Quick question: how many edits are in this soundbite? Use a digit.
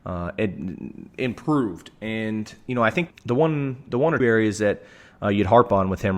2